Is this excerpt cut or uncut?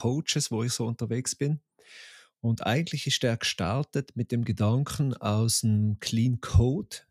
uncut